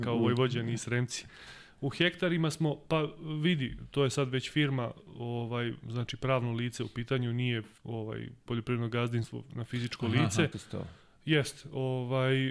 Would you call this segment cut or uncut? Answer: cut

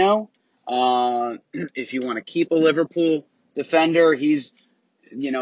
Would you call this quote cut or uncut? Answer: uncut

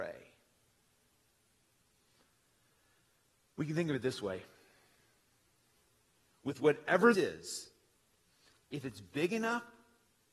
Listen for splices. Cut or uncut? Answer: cut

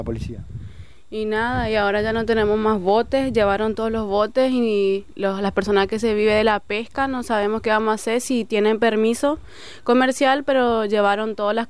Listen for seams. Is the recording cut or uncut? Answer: uncut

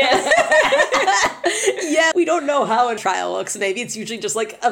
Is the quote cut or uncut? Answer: cut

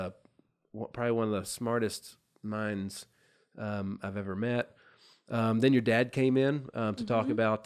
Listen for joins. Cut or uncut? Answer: uncut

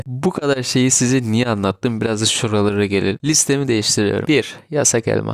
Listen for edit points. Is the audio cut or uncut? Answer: uncut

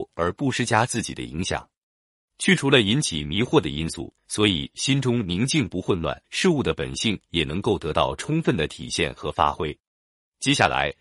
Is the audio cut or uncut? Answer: cut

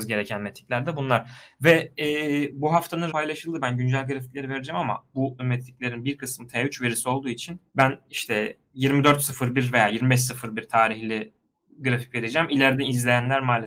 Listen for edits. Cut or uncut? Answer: cut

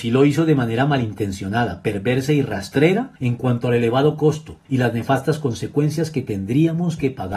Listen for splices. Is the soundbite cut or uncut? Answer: cut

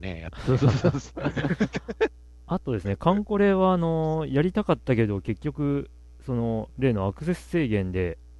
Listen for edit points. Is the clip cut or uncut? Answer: uncut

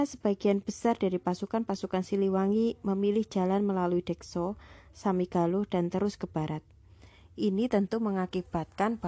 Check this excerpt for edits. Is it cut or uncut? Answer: uncut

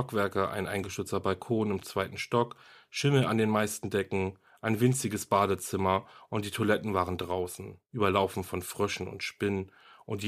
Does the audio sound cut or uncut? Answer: uncut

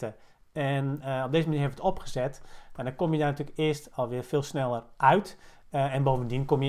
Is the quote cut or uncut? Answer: uncut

